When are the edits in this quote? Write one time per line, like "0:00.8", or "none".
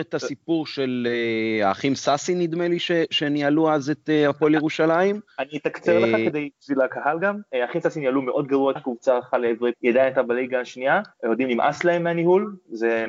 0:08.8
0:09.7
0:11.1